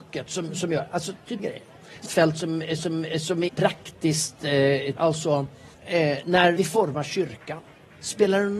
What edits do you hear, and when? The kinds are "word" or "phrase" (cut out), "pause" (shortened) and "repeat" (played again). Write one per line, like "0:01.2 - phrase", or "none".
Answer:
0:01.4 - word
0:02.1 - phrase
0:02.8 - repeat
0:03.5 - phrase
0:05.0 - word
0:05.7 - pause
0:06.6 - phrase